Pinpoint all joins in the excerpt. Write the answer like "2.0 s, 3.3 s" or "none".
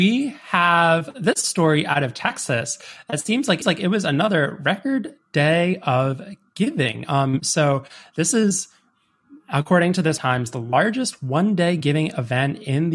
3.6 s, 10.2 s